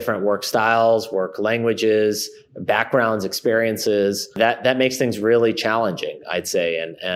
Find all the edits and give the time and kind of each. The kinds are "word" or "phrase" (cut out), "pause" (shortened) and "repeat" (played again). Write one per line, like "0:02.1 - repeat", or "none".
none